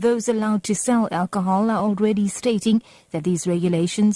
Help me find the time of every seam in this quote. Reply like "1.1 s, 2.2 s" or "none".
none